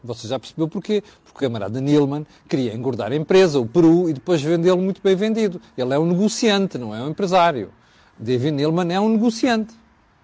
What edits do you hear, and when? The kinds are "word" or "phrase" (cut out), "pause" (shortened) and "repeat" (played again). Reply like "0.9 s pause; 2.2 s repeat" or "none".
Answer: none